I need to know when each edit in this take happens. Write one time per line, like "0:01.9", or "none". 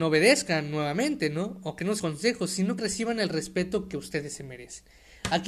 0:02.0
0:02.8